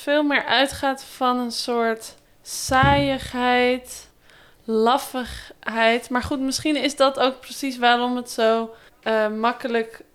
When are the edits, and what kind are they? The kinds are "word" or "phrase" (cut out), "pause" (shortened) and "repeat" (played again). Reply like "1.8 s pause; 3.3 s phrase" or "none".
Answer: 2.2 s pause; 8.9 s pause